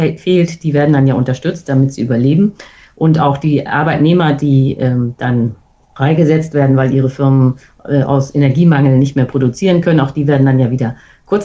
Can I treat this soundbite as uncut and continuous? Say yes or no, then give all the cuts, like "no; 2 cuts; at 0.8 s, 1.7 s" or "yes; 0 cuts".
yes; 0 cuts